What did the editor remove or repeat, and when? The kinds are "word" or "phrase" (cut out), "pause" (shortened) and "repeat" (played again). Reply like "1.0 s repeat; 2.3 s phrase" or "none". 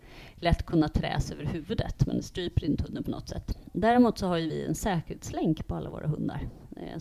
none